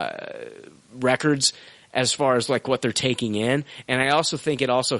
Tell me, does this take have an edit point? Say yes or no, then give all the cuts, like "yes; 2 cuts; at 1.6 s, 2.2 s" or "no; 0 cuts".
no; 0 cuts